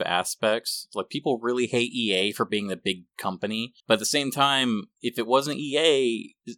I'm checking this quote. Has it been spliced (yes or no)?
yes